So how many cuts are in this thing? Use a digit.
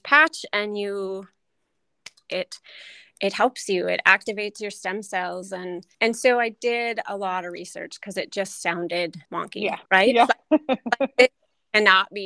3